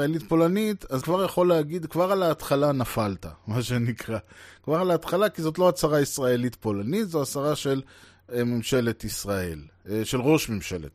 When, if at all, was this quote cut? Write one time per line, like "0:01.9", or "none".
0:01.0